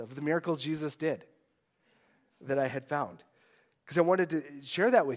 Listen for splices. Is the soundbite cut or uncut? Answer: uncut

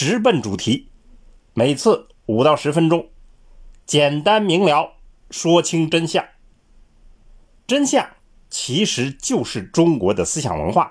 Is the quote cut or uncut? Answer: uncut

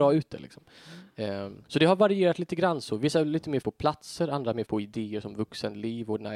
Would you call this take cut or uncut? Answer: cut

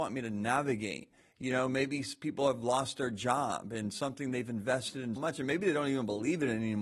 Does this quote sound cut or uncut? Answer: cut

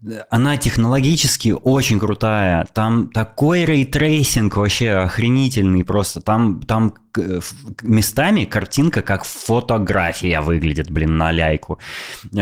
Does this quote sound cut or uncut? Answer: uncut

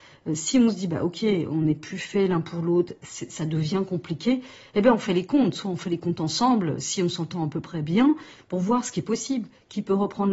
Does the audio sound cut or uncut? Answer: uncut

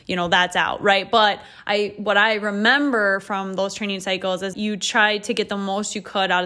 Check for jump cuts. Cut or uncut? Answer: cut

